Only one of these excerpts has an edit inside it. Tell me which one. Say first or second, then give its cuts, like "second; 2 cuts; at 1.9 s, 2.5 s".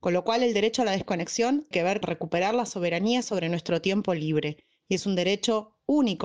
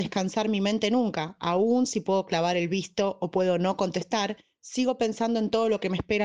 first; 2 cuts; at 1.7 s, 2.0 s